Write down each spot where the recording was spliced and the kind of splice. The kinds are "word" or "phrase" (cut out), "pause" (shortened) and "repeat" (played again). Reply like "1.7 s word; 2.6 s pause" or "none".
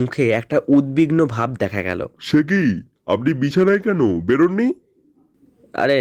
2.2 s pause; 2.9 s pause